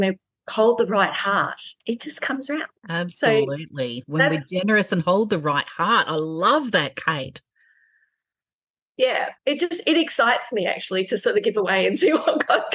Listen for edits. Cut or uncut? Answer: cut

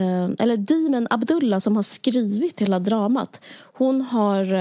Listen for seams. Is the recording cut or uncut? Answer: uncut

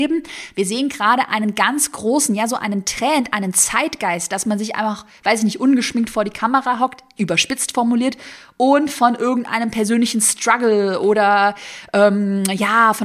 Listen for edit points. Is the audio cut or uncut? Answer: uncut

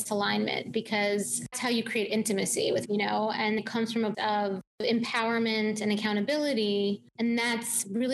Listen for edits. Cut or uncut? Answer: cut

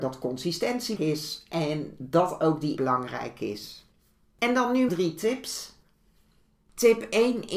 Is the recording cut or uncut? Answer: cut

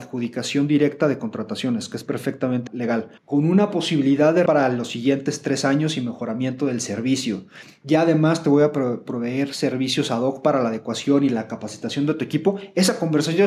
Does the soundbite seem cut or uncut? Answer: cut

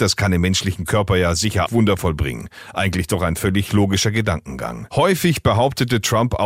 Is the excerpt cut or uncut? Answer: cut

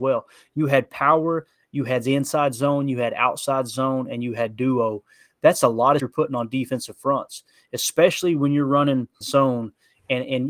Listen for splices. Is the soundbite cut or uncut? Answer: cut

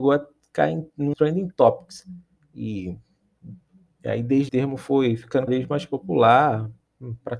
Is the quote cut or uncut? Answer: cut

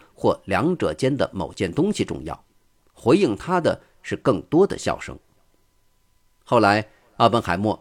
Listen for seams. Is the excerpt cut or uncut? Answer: uncut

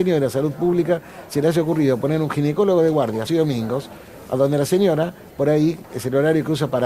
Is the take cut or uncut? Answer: cut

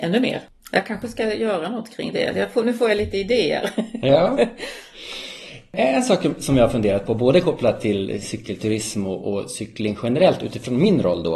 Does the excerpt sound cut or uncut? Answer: uncut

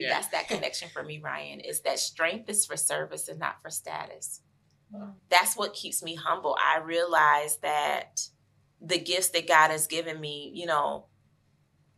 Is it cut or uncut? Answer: cut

